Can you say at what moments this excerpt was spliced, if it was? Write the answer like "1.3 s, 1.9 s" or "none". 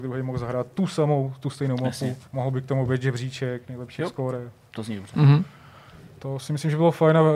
2.3 s